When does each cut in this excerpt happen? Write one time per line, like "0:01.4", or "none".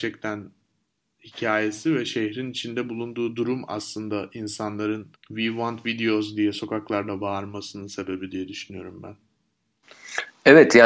0:05.2